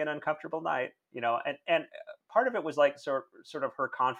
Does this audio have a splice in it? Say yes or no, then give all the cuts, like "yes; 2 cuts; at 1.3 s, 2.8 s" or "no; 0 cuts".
no; 0 cuts